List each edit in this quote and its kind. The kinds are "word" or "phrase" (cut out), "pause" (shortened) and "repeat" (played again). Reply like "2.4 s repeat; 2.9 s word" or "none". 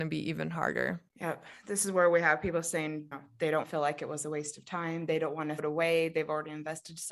1.1 s pause; 3.1 s word; 3.6 s word; 5.6 s word